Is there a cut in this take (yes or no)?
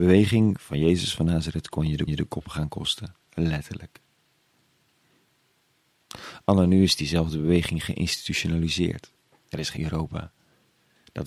yes